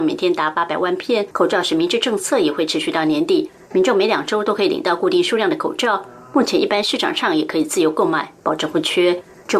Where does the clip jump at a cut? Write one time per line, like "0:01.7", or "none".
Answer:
0:01.3